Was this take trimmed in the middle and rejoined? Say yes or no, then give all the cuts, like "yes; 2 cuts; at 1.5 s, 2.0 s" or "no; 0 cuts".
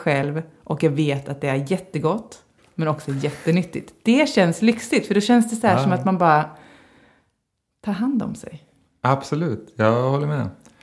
no; 0 cuts